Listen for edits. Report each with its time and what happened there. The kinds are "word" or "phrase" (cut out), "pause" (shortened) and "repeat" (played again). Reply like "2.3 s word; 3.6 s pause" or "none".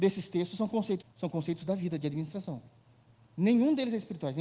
1.0 s word